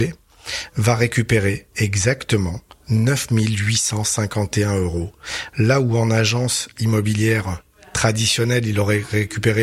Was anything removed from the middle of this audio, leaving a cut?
no; 0 cuts

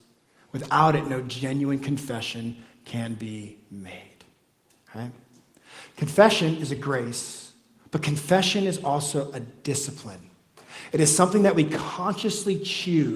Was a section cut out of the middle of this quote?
no; 0 cuts

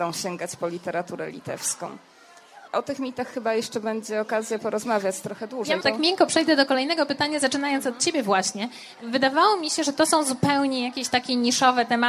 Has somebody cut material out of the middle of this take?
yes; 1 cut; at 5.8 s

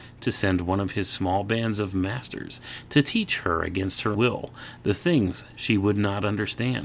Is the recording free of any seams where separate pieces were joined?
no; 1 cut; at 4.1 s

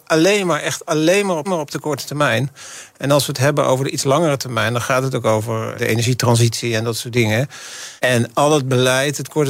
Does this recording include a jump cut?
yes; 3 cuts; at 1.4 s, 5.7 s, 8.0 s

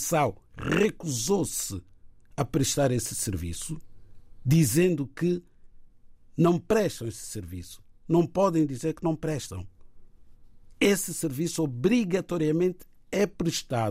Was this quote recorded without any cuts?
yes; 0 cuts

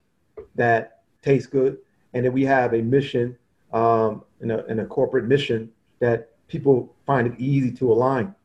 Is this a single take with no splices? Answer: yes; 0 cuts

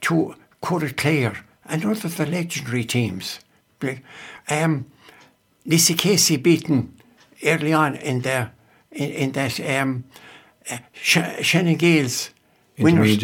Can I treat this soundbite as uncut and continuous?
yes; 0 cuts

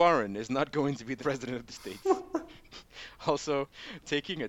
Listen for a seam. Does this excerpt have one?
yes; 2 cuts; at 1.2 s, 1.7 s

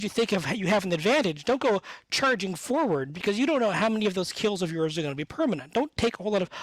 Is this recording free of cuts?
yes; 0 cuts

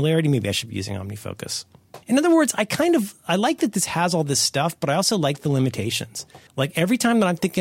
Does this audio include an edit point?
yes; 2 cuts; at 2.0 s, 6.5 s

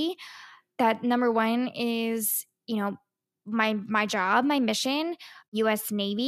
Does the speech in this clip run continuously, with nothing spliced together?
yes; 0 cuts

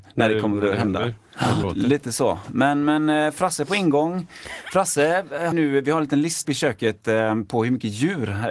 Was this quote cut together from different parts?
yes; 3 cuts; at 1.6 s, 5.5 s, 6.4 s

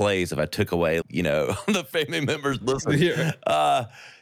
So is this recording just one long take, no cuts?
no; 2 cuts; at 1.0 s, 2.6 s

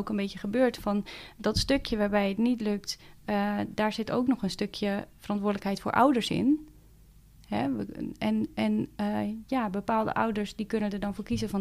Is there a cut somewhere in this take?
no; 0 cuts

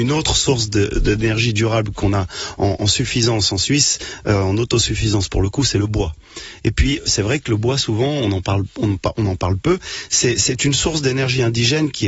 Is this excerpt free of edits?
yes; 0 cuts

